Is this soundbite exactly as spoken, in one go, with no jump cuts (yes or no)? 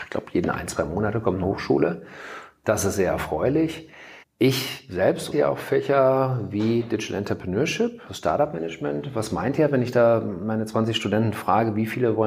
no